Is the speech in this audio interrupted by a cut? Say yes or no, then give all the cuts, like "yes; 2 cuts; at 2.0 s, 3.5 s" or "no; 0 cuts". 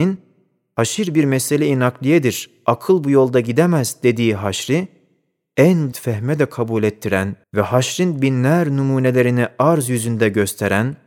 yes; 2 cuts; at 5.9 s, 7.4 s